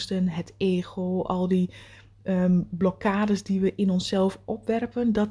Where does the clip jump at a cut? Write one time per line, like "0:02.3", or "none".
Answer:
none